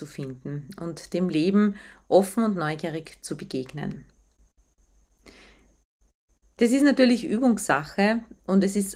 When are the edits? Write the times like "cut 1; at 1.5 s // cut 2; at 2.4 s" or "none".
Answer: none